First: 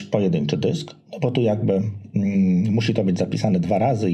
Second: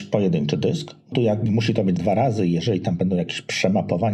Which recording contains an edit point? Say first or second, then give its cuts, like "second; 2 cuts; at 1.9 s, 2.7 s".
second; 3 cuts; at 1.1 s, 1.5 s, 2.0 s